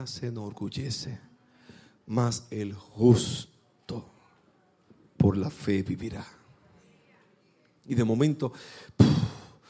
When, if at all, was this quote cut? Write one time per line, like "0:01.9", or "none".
none